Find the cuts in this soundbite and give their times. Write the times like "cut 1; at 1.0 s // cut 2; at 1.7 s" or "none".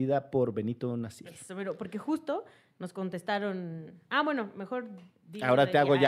none